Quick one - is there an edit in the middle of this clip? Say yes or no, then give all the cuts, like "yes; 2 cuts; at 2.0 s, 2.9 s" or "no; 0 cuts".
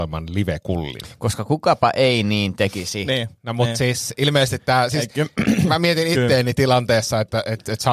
no; 0 cuts